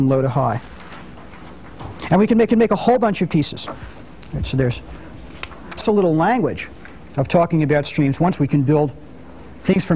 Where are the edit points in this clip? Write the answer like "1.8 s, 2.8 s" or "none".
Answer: 2.5 s, 5.8 s, 8.4 s